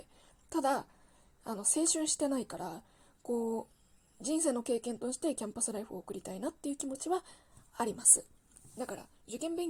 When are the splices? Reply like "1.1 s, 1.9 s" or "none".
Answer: none